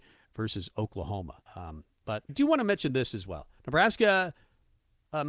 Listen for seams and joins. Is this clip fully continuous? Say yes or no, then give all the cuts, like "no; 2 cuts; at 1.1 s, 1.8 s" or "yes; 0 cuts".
no; 3 cuts; at 1.5 s, 2.3 s, 3.6 s